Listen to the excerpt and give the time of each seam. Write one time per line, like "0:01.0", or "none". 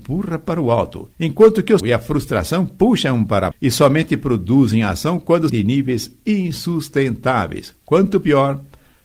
0:01.1
0:01.8
0:03.5
0:05.5

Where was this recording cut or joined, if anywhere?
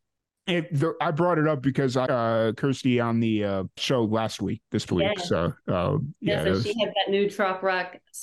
0:02.1
0:03.8
0:04.9

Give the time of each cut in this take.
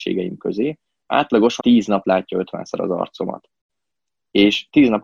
0:01.6
0:02.0

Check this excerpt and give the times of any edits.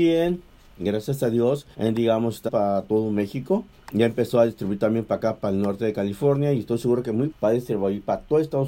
0:01.7
0:02.5
0:03.7
0:07.3

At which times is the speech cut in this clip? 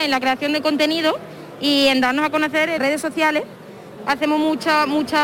0:02.8

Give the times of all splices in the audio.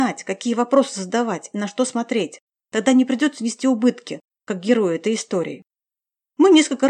none

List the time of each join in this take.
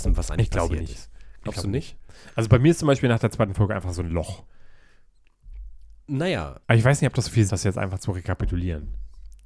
0:06.6
0:07.5

